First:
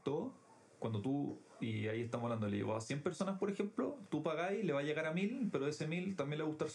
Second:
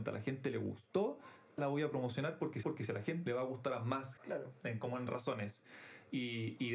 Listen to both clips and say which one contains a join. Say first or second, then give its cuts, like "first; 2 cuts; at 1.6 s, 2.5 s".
second; 4 cuts; at 1.6 s, 2.6 s, 3.3 s, 4.2 s